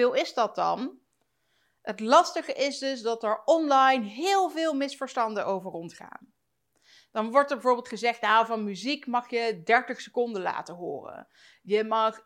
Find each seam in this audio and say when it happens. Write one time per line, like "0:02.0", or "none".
none